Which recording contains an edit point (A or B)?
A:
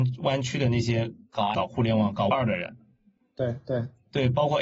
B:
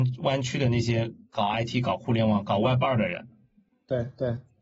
A